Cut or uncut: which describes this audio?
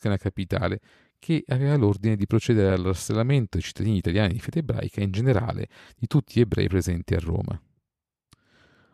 uncut